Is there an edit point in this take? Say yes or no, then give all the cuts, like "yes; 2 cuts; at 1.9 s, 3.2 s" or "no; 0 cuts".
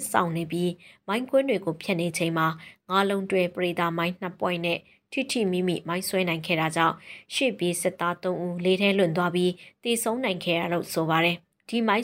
no; 0 cuts